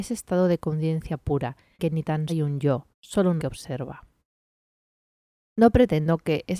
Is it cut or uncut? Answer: cut